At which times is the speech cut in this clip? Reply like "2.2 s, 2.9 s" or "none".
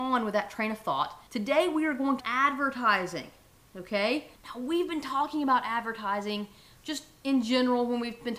1.3 s, 2.2 s, 4.3 s